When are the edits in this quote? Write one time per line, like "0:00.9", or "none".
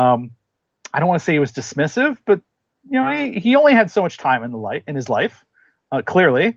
none

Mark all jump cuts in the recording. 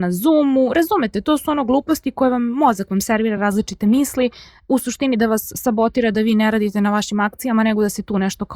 none

